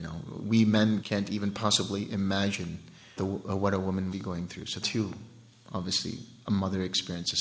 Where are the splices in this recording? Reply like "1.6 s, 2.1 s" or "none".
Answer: 1.0 s, 3.2 s, 4.1 s, 4.8 s